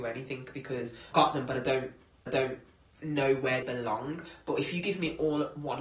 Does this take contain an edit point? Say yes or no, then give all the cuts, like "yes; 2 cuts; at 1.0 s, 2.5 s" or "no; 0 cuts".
yes; 3 cuts; at 1.1 s, 2.3 s, 3.6 s